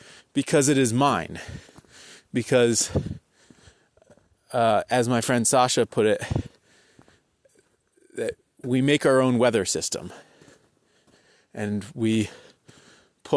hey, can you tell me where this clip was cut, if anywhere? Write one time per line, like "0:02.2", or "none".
none